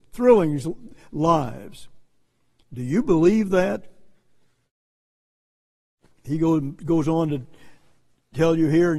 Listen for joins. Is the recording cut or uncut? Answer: uncut